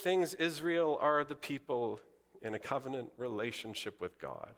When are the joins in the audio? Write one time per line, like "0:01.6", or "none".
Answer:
none